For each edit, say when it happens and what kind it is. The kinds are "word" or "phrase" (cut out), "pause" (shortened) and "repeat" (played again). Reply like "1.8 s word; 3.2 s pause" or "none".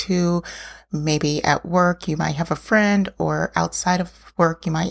none